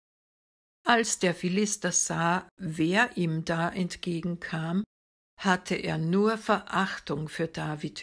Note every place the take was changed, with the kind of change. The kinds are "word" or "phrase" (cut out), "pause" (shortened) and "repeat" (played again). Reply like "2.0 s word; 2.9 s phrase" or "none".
none